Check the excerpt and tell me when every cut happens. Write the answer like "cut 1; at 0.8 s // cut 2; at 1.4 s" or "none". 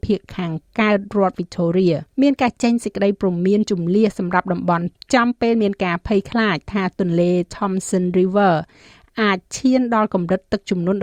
cut 1; at 2.1 s // cut 2; at 5.0 s